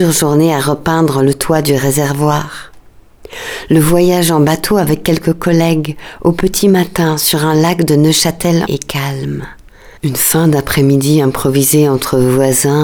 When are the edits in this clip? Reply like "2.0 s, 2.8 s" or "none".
8.7 s, 10.0 s